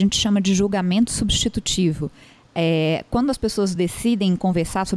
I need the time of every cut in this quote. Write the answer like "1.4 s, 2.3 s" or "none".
none

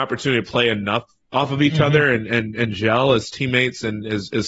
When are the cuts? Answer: 1.2 s

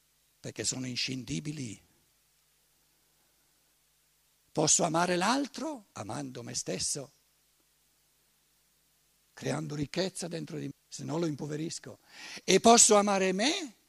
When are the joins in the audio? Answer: 5.9 s, 10.7 s

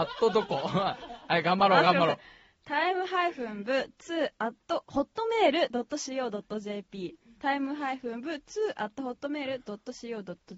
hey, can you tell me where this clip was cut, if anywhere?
none

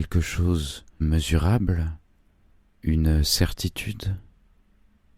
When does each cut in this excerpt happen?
1.0 s

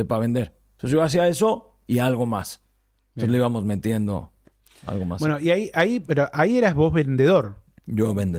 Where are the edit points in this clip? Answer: none

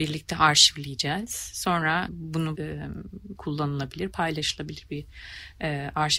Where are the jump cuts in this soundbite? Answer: 2.1 s, 2.5 s, 3.3 s

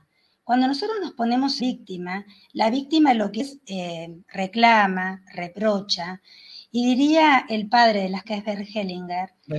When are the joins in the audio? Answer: 1.6 s, 3.4 s, 8.2 s

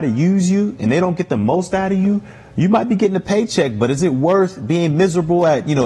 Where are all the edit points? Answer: none

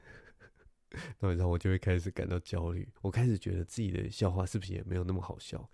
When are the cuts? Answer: 3.0 s

